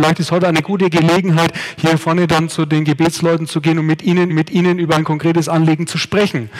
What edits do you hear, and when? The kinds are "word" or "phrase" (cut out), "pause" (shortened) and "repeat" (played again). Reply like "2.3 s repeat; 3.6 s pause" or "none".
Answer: 4.3 s repeat